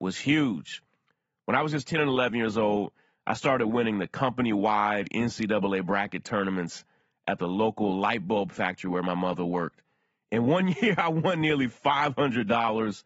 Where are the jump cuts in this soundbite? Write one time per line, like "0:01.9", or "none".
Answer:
none